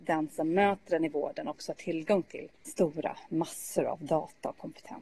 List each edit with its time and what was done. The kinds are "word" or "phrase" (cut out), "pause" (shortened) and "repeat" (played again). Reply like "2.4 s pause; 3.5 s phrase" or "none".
2.5 s pause